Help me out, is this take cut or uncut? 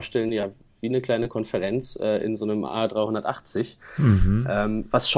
uncut